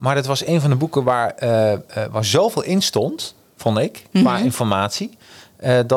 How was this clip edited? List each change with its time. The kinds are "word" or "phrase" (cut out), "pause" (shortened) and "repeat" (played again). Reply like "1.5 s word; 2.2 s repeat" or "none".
none